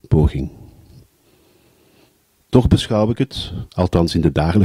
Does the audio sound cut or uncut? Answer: cut